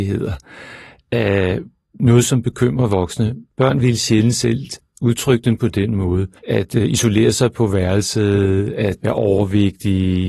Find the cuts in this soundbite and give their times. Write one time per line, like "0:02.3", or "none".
0:03.5
0:06.4